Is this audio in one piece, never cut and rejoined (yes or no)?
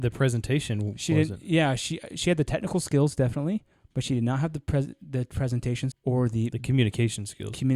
no